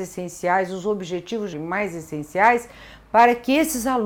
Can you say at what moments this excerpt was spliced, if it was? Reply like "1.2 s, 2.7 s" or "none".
1.5 s

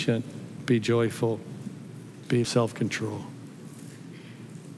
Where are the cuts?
2.4 s

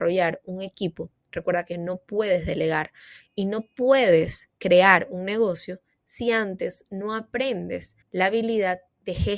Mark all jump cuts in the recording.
4.5 s, 8.0 s

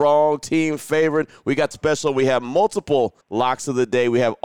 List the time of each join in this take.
1.7 s, 3.2 s

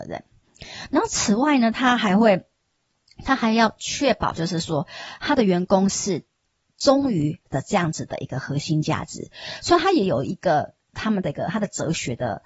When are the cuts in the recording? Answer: 7.5 s

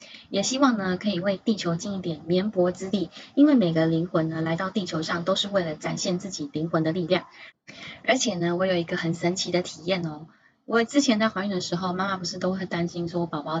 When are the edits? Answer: none

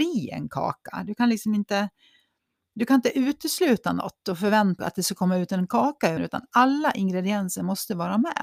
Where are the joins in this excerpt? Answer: 4.8 s, 6.2 s

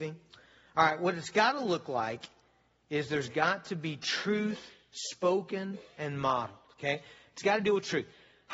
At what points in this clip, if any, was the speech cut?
none

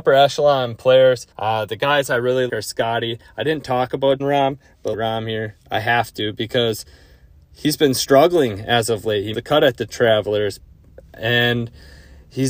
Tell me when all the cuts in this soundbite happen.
1.3 s, 2.5 s, 4.2 s, 4.9 s, 5.6 s, 9.3 s

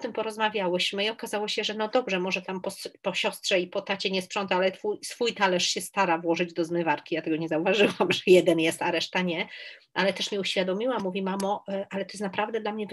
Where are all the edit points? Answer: none

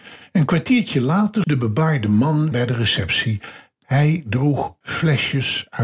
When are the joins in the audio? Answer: 1.4 s, 2.5 s, 4.8 s

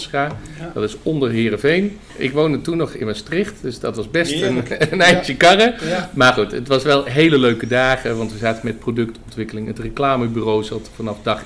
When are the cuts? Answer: none

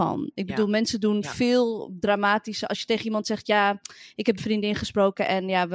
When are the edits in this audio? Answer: 4.4 s

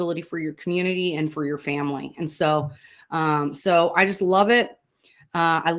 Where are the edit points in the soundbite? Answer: none

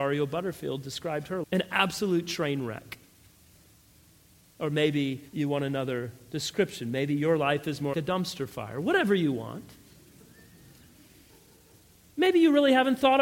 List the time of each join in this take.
1.4 s, 5.3 s, 7.9 s

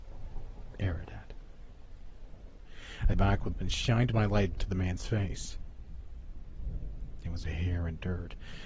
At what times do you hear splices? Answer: 3.1 s, 3.5 s, 4.5 s, 7.4 s

